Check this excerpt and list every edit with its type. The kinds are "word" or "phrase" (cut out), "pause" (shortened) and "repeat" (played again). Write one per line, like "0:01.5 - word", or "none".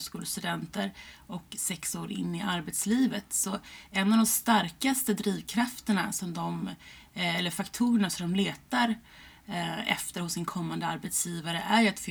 none